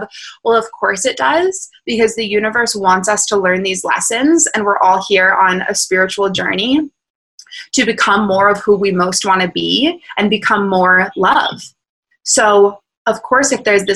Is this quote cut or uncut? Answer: uncut